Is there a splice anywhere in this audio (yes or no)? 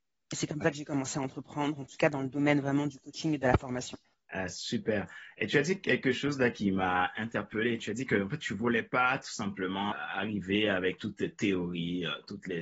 yes